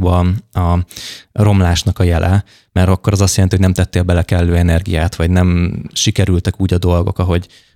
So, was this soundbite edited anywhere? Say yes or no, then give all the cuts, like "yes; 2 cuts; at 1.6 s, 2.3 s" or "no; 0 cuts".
no; 0 cuts